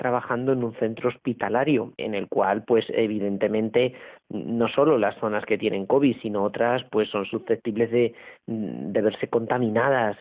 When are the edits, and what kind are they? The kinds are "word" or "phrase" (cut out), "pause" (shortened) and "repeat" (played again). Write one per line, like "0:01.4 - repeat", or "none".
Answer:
0:02.0 - word